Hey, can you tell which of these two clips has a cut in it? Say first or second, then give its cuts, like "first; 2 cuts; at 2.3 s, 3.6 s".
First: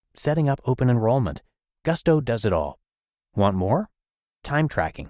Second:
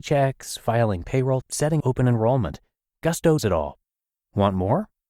second; 3 cuts; at 1.4 s, 1.8 s, 3.4 s